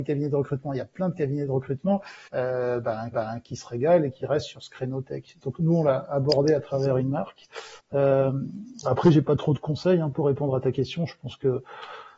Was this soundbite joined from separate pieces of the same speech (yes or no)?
yes